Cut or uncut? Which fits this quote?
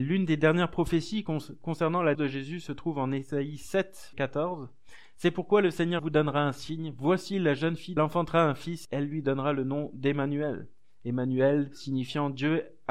cut